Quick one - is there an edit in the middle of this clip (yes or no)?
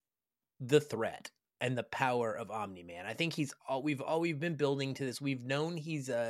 no